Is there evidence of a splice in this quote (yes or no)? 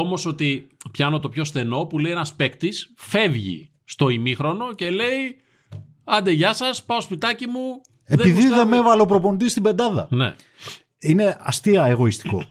no